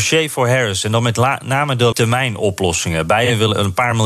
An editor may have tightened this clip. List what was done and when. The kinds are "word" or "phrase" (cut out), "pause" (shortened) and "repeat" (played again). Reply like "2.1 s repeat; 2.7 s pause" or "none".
1.9 s word